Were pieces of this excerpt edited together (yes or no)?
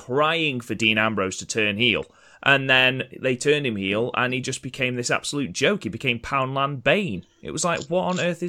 no